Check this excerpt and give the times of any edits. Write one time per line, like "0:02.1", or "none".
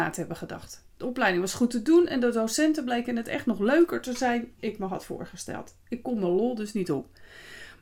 0:04.5